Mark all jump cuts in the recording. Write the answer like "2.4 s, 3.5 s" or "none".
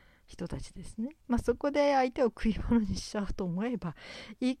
1.2 s